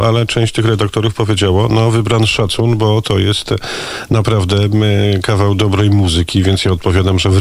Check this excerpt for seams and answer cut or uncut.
uncut